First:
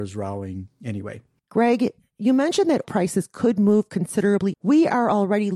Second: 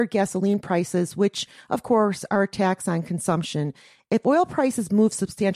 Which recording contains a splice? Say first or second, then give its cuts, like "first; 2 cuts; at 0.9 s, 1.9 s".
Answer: first; 2 cuts; at 2.8 s, 4.5 s